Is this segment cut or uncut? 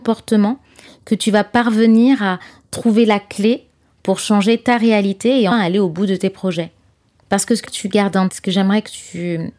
cut